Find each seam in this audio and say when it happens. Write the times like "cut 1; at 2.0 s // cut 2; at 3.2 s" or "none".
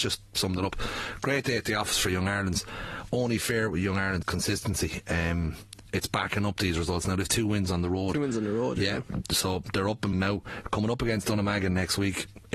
cut 1; at 4.2 s // cut 2; at 10.1 s